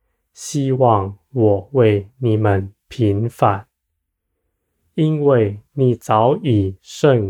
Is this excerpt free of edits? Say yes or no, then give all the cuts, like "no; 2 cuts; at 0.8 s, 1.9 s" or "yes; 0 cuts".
yes; 0 cuts